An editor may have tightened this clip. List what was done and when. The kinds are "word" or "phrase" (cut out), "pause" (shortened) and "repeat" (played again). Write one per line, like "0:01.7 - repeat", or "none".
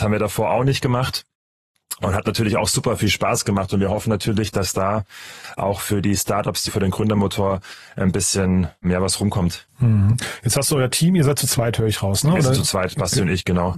0:06.7 - phrase
0:08.8 - word